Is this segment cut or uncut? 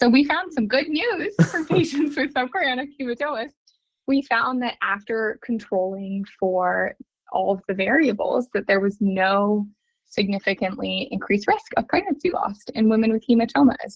uncut